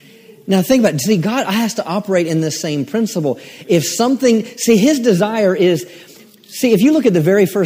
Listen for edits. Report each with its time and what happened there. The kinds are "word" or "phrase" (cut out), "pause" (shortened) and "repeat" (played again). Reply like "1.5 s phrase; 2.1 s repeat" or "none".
none